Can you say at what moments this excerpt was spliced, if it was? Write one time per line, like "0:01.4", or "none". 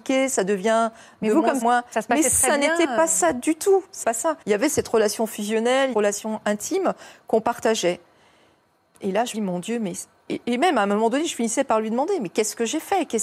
0:01.6
0:04.0
0:04.4
0:05.9
0:09.3
0:10.3